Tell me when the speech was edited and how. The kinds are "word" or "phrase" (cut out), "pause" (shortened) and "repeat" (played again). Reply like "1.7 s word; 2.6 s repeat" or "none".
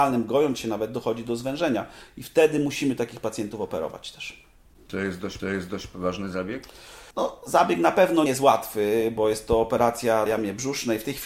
5.4 s repeat; 7.1 s pause; 8.3 s word; 10.3 s word